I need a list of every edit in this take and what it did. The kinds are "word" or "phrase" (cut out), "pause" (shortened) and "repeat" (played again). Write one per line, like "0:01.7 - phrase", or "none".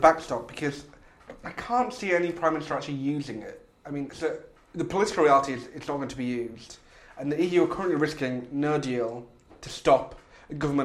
none